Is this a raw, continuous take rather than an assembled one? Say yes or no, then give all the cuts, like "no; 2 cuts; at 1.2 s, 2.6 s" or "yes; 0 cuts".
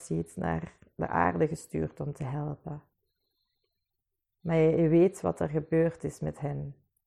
yes; 0 cuts